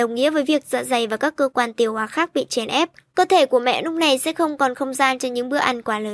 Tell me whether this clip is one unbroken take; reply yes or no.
yes